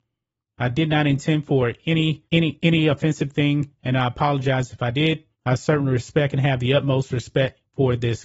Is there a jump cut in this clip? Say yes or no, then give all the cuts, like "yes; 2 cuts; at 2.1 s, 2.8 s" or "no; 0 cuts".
yes; 2 cuts; at 2.3 s, 5.3 s